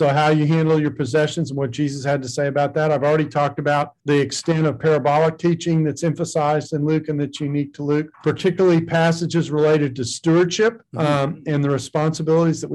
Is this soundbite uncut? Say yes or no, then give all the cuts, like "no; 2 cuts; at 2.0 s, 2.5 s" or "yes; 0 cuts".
no; 3 cuts; at 4.0 s, 8.1 s, 10.9 s